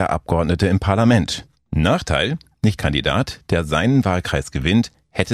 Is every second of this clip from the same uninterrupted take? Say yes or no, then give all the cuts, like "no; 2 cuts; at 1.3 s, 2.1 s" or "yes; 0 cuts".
no; 1 cut; at 2.8 s